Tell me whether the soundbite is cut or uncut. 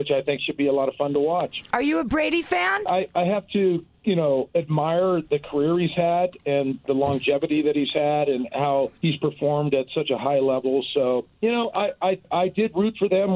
uncut